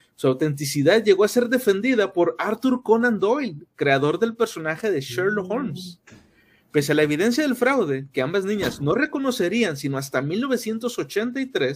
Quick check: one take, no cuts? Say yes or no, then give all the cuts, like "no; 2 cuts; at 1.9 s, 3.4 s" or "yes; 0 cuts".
yes; 0 cuts